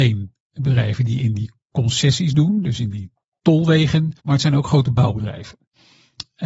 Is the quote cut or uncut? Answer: cut